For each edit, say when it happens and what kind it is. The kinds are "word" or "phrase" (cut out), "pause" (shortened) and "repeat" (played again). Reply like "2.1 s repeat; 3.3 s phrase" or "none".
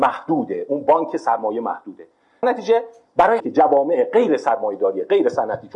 2.4 s word; 3.4 s word